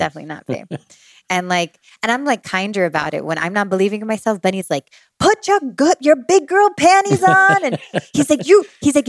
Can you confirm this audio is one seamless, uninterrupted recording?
yes; 0 cuts

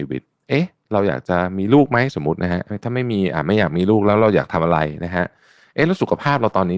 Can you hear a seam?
no; 0 cuts

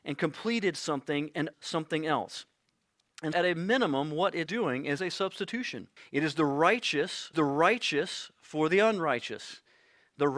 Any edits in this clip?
yes; 6 cuts; at 1.5 s, 3.3 s, 4.5 s, 5.0 s, 6.0 s, 7.3 s

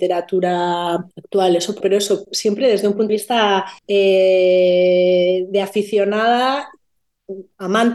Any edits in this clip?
yes; 4 cuts; at 1.1 s, 1.8 s, 3.1 s, 3.8 s

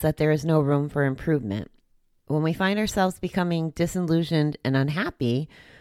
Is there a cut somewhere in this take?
no; 0 cuts

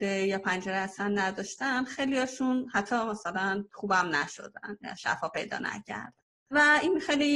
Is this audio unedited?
yes; 0 cuts

